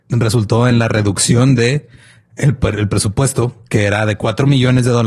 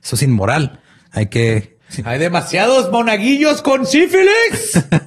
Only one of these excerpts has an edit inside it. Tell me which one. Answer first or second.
second